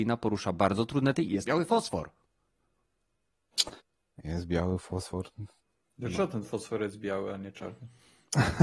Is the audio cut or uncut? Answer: cut